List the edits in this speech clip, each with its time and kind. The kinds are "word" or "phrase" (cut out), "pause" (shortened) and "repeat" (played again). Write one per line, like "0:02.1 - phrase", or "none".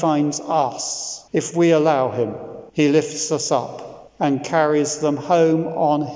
0:01.3 - pause
0:02.7 - pause
0:04.1 - pause